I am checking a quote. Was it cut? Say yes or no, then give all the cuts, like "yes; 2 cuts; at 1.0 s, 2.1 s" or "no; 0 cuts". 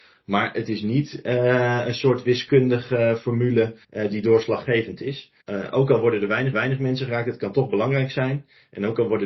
yes; 3 cuts; at 3.8 s, 5.4 s, 6.5 s